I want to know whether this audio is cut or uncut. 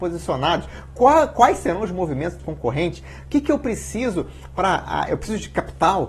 cut